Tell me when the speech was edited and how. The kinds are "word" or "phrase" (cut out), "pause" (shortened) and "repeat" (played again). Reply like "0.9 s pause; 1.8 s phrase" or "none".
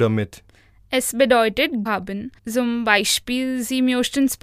1.9 s phrase; 2.4 s pause